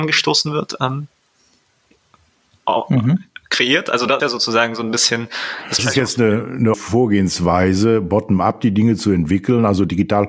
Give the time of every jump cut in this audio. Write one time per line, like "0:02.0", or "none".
0:04.2
0:05.8
0:06.7